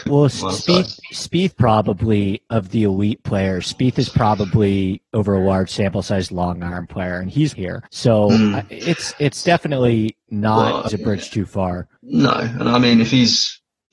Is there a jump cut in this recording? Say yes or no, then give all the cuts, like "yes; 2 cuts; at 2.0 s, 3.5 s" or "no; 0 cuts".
yes; 6 cuts; at 1.5 s, 6.3 s, 7.5 s, 7.9 s, 10.9 s, 12.0 s